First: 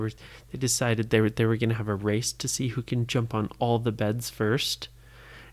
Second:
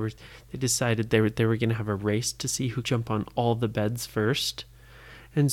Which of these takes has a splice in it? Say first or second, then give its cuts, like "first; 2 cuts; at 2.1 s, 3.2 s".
second; 1 cut; at 2.8 s